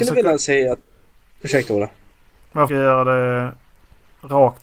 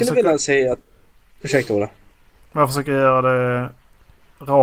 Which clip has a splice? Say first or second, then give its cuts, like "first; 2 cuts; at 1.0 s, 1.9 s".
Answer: first; 1 cut; at 2.7 s